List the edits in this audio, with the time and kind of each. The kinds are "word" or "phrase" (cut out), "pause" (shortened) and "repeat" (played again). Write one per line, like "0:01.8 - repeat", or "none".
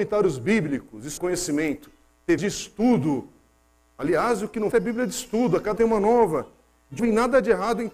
0:01.2 - word
0:02.4 - word
0:04.7 - word
0:05.8 - word
0:07.0 - word